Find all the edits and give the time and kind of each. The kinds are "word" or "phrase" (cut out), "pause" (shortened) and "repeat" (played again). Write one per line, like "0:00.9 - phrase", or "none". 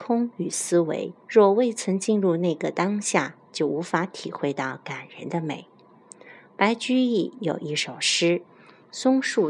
0:01.2 - pause
0:08.5 - pause